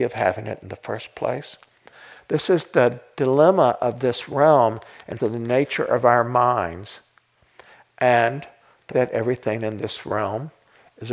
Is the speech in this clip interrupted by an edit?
yes; 2 cuts; at 5.2 s, 8.9 s

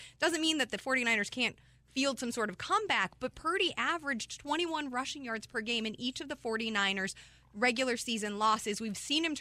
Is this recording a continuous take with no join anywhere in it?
yes; 0 cuts

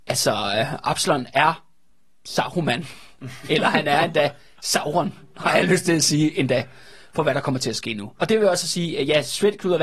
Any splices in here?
no; 0 cuts

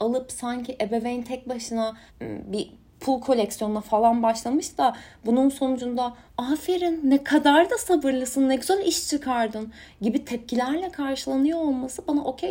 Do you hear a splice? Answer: yes; 2 cuts; at 2.1 s, 6.3 s

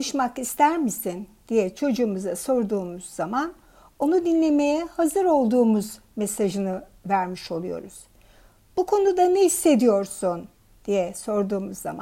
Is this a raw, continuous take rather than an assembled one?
yes; 0 cuts

